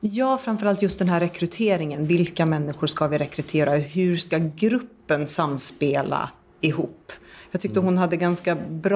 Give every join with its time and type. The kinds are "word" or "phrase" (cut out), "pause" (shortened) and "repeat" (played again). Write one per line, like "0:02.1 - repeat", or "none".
none